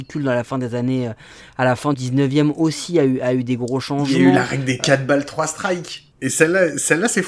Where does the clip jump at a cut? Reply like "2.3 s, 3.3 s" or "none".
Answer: 1.9 s, 6.1 s